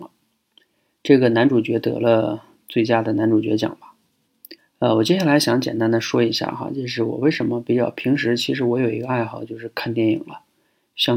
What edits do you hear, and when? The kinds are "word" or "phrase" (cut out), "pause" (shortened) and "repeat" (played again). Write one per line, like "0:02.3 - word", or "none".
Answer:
0:04.6 - pause